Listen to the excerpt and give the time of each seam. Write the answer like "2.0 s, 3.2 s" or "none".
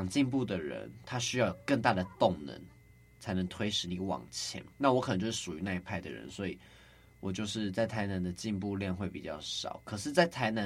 4.7 s